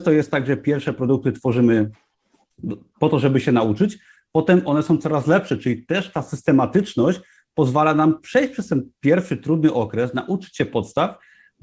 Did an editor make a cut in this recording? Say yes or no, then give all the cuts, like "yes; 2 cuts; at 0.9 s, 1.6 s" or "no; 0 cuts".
no; 0 cuts